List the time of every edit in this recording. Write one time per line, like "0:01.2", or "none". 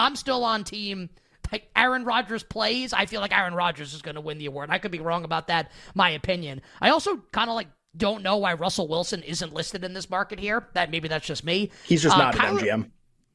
none